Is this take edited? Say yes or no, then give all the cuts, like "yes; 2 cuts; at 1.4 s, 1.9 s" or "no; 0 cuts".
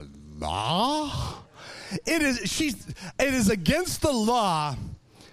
no; 0 cuts